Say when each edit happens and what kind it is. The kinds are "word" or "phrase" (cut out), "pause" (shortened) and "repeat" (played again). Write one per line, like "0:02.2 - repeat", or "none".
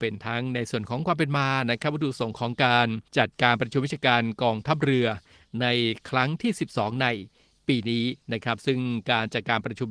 0:03.1 - pause
0:08.2 - pause

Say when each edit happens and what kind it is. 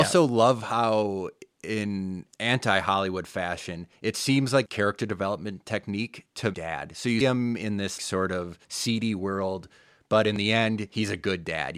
0:03.9 - pause
0:04.7 - phrase
0:06.5 - phrase
0:07.2 - word
0:08.0 - word
0:08.6 - pause

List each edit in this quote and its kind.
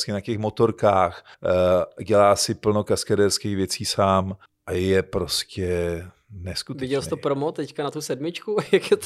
0:01.3 - pause
0:04.4 - pause

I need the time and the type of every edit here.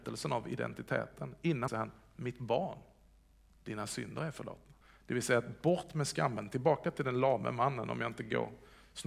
0:01.7 - phrase
0:04.8 - pause

